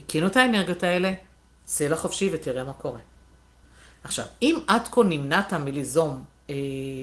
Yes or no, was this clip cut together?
no